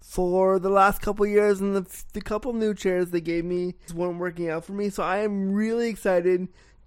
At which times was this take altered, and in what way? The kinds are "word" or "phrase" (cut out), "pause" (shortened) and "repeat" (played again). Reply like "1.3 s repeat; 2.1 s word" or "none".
3.9 s word